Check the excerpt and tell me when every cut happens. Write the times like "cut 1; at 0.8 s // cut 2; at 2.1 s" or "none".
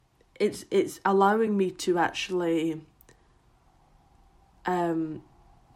none